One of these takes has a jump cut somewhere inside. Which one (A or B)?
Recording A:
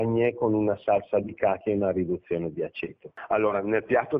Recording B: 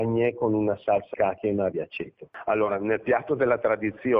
B